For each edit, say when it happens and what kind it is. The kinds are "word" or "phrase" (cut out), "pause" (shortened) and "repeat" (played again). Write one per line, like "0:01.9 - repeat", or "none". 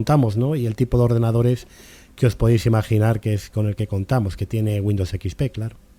none